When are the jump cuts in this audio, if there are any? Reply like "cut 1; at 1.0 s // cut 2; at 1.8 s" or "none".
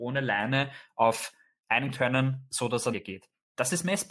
cut 1; at 1.9 s // cut 2; at 2.9 s